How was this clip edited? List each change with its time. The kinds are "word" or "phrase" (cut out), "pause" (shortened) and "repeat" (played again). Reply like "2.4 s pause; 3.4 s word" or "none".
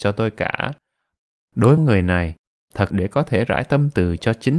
1.8 s phrase; 2.9 s phrase